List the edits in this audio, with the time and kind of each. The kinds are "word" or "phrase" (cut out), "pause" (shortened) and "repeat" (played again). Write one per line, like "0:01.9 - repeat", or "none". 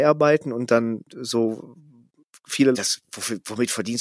0:01.1 - pause
0:02.7 - phrase